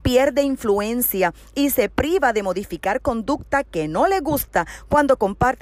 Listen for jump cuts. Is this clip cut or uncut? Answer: uncut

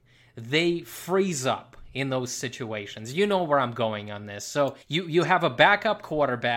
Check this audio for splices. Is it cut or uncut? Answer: cut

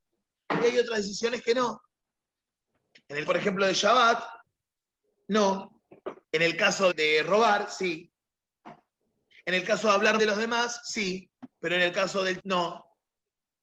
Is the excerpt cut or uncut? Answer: cut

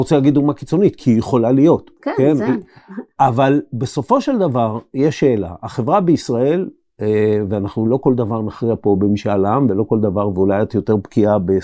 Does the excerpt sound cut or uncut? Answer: cut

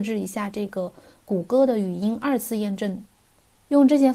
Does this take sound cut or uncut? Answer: uncut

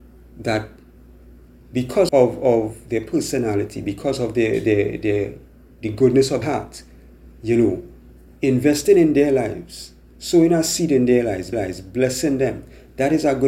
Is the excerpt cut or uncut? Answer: cut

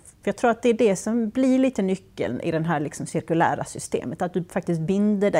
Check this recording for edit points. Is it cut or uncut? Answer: uncut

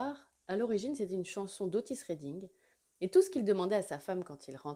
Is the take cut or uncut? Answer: uncut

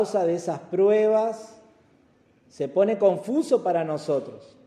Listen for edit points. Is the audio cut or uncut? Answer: uncut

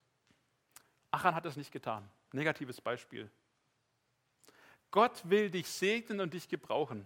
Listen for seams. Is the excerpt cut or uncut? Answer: uncut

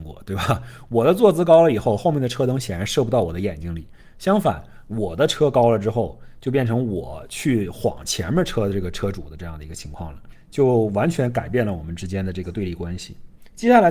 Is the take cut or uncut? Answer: uncut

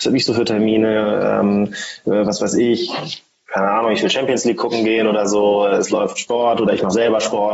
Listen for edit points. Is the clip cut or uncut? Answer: uncut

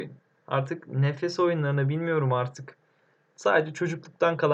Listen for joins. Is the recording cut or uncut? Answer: uncut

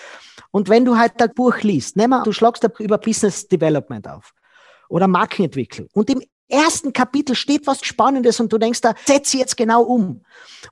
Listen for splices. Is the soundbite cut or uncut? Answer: cut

